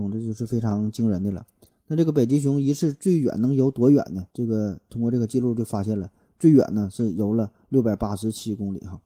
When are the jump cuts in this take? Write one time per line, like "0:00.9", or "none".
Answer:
0:04.3